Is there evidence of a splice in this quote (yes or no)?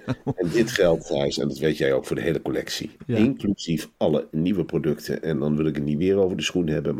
no